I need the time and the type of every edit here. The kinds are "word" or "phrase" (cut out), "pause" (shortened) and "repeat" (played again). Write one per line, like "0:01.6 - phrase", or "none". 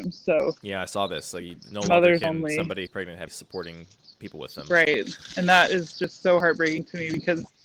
0:02.9 - word
0:03.3 - word
0:04.1 - pause